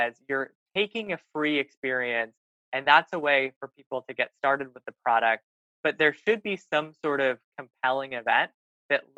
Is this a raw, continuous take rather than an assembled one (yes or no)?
yes